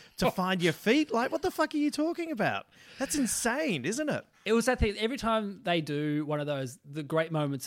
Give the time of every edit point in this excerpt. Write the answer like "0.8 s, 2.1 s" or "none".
none

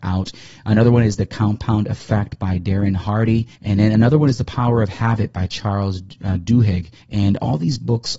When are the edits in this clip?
3.6 s, 7.0 s

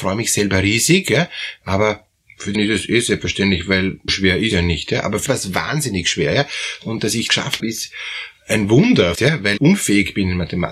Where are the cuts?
2.5 s, 4.1 s, 4.5 s, 5.3 s, 7.3 s, 7.6 s, 9.1 s, 9.6 s

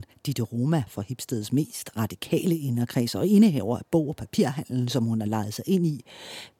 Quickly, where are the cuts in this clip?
none

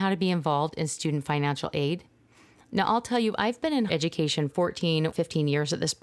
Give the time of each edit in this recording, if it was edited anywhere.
3.9 s, 4.5 s, 5.1 s

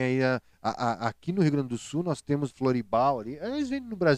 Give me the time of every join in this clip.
2.5 s

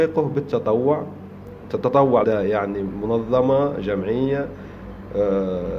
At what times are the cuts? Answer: 2.2 s

